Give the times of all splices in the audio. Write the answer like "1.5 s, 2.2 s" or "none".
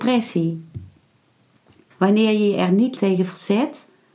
3.0 s